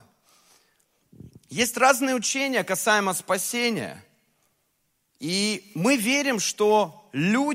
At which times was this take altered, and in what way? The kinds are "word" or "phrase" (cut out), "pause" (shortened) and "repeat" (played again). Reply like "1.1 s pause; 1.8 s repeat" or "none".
none